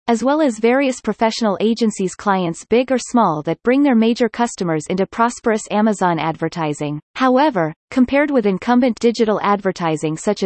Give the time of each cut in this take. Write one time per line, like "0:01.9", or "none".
0:07.1